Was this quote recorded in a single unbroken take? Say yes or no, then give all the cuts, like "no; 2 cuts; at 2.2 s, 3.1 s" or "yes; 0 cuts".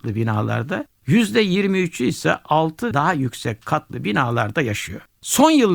no; 1 cut; at 2.9 s